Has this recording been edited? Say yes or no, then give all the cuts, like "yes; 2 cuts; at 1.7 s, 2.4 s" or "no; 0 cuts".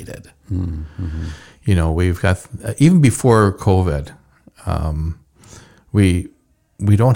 no; 0 cuts